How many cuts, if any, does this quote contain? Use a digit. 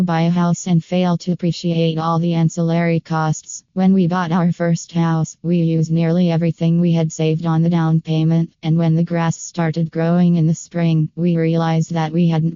1